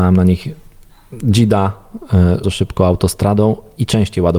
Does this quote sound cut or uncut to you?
cut